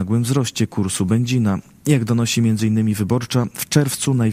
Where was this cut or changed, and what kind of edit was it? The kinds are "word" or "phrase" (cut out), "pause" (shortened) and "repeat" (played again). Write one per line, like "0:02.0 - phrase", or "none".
none